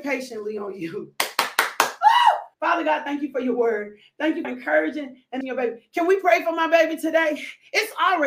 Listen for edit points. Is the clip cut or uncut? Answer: cut